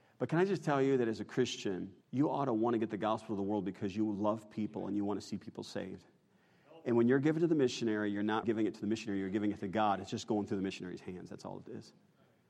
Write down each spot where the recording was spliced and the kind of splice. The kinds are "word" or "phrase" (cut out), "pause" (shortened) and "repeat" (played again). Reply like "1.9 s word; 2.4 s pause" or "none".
2.0 s pause; 8.4 s word